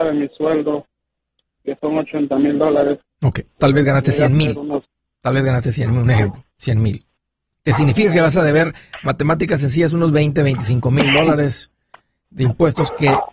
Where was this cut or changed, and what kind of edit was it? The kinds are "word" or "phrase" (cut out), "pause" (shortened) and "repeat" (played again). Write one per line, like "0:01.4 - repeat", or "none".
0:03.6 - word